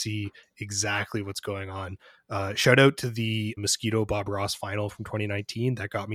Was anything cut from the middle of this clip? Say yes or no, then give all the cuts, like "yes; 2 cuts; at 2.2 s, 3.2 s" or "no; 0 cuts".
yes; 1 cut; at 3.6 s